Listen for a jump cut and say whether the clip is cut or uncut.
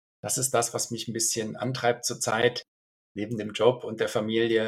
uncut